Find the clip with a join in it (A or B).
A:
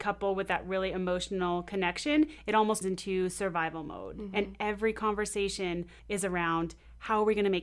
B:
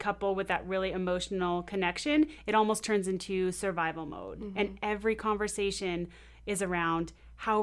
A